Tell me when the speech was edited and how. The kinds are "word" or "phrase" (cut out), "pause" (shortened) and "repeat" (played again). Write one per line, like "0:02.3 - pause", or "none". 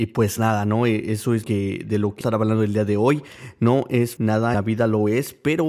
0:01.4 - word
0:02.2 - word
0:04.2 - word
0:04.5 - word